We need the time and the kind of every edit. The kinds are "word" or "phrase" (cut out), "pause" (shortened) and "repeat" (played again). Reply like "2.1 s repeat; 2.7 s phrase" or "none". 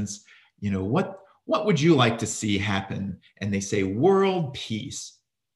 none